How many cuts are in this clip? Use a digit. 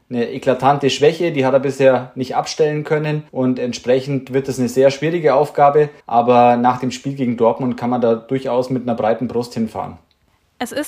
2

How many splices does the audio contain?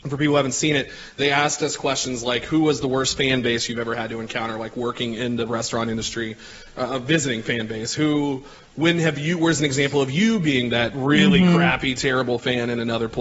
0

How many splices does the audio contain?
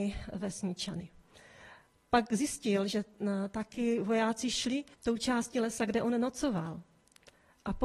1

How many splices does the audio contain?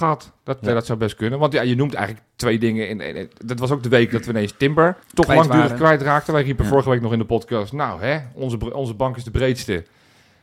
1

